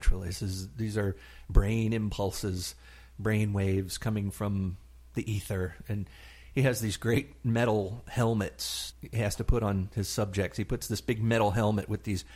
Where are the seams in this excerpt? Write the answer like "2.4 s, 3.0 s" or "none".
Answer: 8.9 s